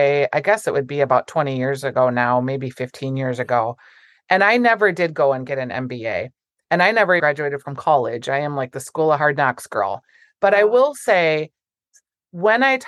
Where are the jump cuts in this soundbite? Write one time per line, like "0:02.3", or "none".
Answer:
0:07.2